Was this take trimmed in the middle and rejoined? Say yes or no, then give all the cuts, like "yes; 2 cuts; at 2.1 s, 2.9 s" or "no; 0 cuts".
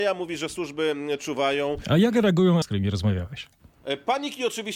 yes; 1 cut; at 2.6 s